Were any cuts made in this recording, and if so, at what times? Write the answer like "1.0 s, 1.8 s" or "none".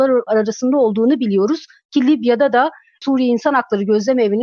none